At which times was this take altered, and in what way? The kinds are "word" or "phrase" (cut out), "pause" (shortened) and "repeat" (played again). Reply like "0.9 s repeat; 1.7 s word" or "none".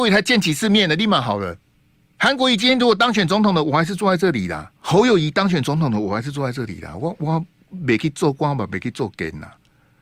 1.7 s pause; 4.8 s pause